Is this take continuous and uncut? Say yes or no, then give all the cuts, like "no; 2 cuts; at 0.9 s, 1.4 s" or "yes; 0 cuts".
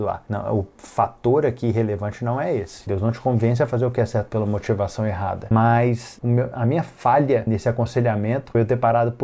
yes; 0 cuts